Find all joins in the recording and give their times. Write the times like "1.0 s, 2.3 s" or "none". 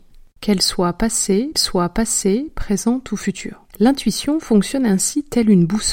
1.5 s, 3.7 s